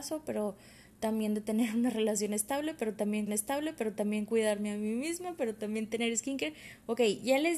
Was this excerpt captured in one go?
no; 1 cut; at 3.3 s

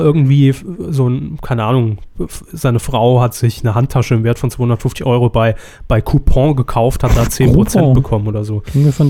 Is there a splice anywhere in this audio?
no; 0 cuts

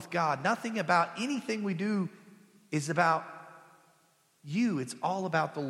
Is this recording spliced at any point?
no; 0 cuts

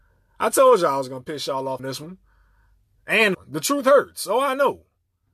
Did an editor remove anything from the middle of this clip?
yes; 2 cuts; at 1.8 s, 3.3 s

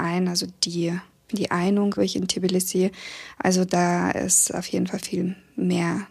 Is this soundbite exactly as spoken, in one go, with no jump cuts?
no; 3 cuts; at 1.3 s, 2.0 s, 5.0 s

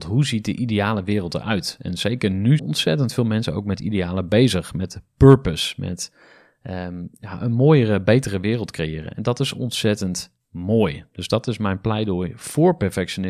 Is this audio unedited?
no; 1 cut; at 2.6 s

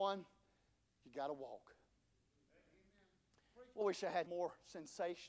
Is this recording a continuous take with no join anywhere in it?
no; 2 cuts; at 3.8 s, 4.3 s

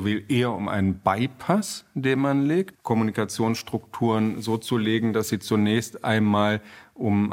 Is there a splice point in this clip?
yes; 1 cut; at 2.7 s

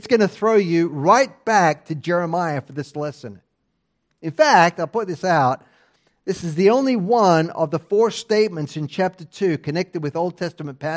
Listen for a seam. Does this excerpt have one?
no; 0 cuts

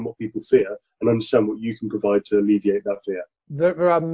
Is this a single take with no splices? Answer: yes; 0 cuts

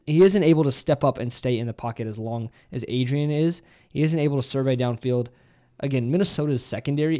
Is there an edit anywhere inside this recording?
no; 0 cuts

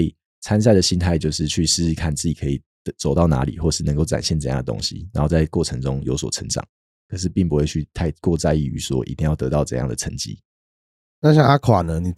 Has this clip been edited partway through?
no; 0 cuts

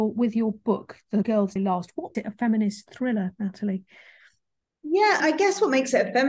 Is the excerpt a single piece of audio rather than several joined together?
no; 4 cuts; at 1.2 s, 1.6 s, 2.1 s, 5.2 s

